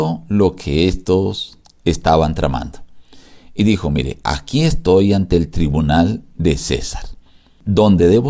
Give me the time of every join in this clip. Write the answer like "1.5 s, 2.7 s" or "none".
none